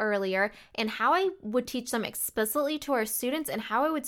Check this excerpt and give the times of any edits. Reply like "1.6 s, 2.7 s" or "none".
none